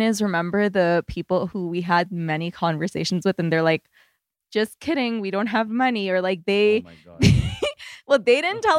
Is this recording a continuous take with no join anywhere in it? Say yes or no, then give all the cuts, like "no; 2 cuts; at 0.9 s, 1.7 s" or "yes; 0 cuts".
yes; 0 cuts